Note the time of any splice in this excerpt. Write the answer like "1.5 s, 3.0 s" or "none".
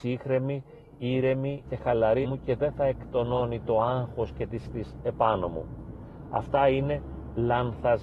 1.6 s, 2.2 s, 4.6 s